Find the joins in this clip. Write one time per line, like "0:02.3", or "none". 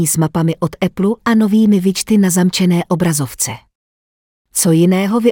none